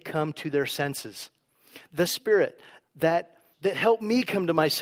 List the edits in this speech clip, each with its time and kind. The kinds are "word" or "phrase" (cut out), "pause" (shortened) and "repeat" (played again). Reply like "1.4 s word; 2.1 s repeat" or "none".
2.1 s word; 2.8 s word; 3.5 s word